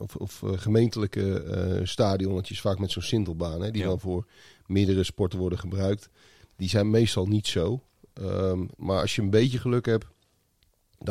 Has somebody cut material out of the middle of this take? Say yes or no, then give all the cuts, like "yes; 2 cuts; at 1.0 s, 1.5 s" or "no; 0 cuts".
no; 0 cuts